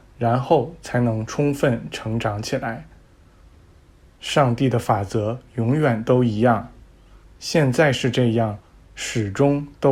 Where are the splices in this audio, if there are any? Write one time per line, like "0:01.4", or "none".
none